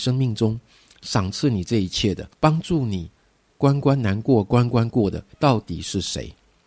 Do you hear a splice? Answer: yes; 2 cuts; at 2.3 s, 5.3 s

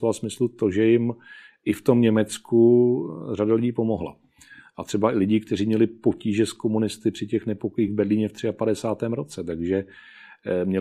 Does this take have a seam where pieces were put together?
no; 0 cuts

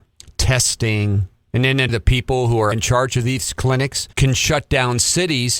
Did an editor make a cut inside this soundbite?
yes; 3 cuts; at 1.9 s, 2.7 s, 4.1 s

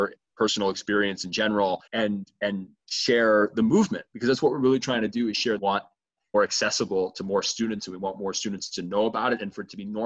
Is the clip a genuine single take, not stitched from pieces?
no; 3 cuts; at 1.9 s, 5.6 s, 6.3 s

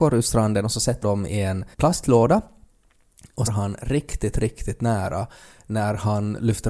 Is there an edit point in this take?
yes; 3 cuts; at 1.0 s, 1.7 s, 3.5 s

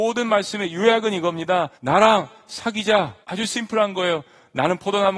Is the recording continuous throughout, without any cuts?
no; 2 cuts; at 1.7 s, 3.2 s

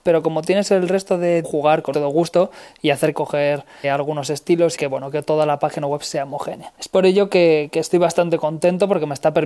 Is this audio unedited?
no; 6 cuts; at 1.4 s, 1.9 s, 3.1 s, 3.8 s, 4.8 s, 6.7 s

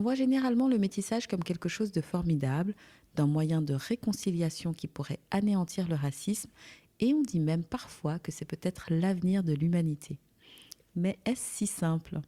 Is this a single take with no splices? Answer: yes; 0 cuts

